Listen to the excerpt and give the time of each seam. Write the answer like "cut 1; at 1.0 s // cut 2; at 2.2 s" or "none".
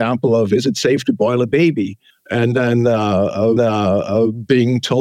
cut 1; at 2.1 s // cut 2; at 3.6 s